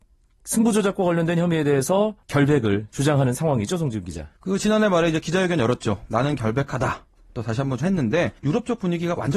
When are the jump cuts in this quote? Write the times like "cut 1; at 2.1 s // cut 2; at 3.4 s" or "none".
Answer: cut 1; at 2.2 s // cut 2; at 4.4 s // cut 3; at 7.8 s // cut 4; at 8.4 s